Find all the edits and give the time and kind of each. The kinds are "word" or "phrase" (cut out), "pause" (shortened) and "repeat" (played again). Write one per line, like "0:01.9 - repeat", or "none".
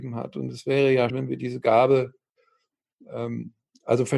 0:01.1 - word